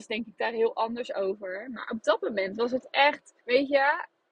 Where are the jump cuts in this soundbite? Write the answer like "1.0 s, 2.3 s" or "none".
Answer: 3.4 s